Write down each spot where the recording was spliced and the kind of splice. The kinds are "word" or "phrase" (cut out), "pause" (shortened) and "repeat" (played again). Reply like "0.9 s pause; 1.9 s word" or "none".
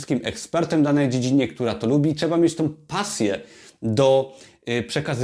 none

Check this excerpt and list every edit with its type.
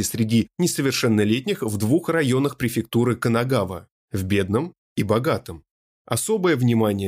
none

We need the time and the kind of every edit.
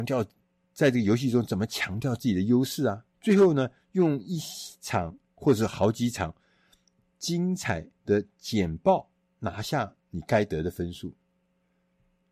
3.1 s pause; 7.9 s pause; 10.0 s pause

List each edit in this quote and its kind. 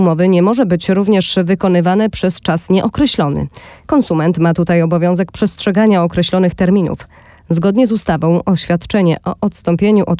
none

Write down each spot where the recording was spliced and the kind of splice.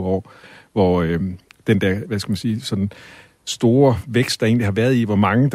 2.0 s word

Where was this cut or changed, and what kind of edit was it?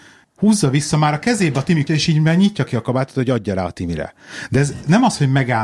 1.9 s word

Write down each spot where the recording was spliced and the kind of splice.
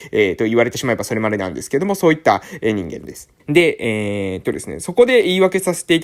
3.4 s pause

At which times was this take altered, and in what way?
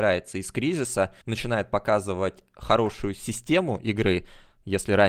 1.2 s pause

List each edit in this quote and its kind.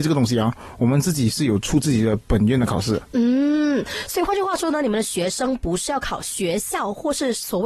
3.1 s pause

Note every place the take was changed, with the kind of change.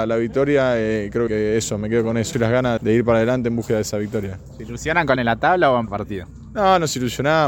1.3 s word; 2.3 s phrase; 2.8 s word; 5.2 s phrase; 5.9 s word

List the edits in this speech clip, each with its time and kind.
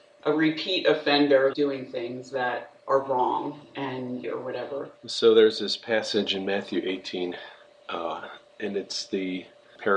1.5 s phrase; 2.8 s pause; 4.2 s phrase; 5.0 s pause

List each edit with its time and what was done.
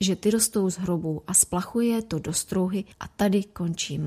2.9 s pause

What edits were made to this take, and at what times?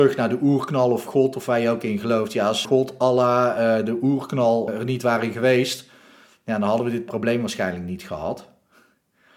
2.6 s word; 4.7 s word

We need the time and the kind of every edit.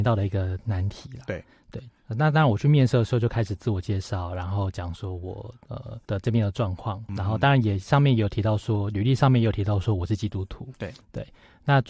2.0 s pause; 6.0 s pause; 7.1 s word

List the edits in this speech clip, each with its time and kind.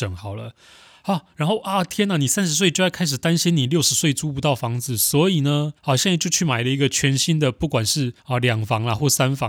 5.8 s pause; 8.2 s pause

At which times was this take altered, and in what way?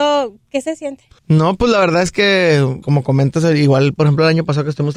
1.2 s pause; 2.8 s word

